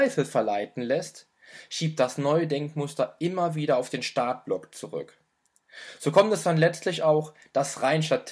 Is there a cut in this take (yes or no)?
no